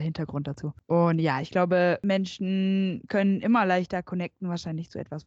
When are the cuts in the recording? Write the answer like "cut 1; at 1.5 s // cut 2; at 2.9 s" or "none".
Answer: none